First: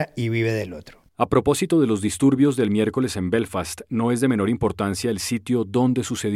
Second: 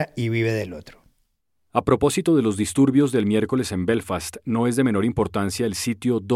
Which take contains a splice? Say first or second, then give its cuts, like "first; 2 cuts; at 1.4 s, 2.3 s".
first; 1 cut; at 1.1 s